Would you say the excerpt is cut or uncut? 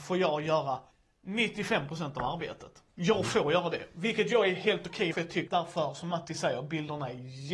cut